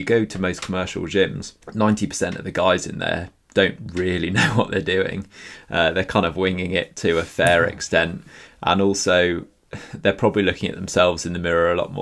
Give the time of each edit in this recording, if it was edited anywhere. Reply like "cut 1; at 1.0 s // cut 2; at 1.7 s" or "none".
cut 1; at 1.6 s